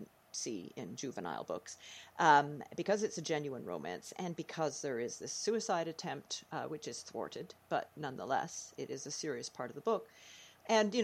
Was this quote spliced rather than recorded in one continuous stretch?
yes; 1 cut; at 8.8 s

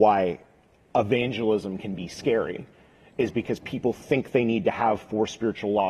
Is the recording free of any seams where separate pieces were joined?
yes; 0 cuts

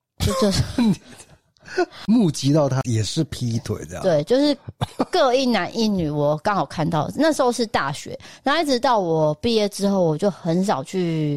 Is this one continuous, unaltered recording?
yes; 0 cuts

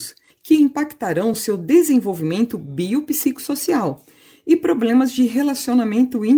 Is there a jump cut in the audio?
no; 0 cuts

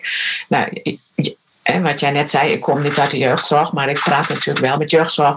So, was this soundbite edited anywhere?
no; 0 cuts

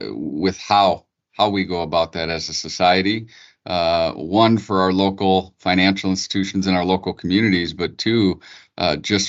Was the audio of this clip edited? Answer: no; 0 cuts

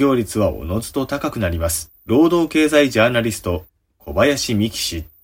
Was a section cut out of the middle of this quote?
yes; 1 cut; at 2.0 s

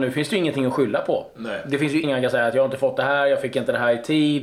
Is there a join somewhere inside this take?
yes; 1 cut; at 2.0 s

